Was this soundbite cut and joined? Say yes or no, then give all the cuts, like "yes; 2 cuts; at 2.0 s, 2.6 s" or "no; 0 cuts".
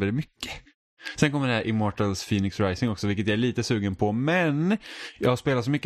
no; 0 cuts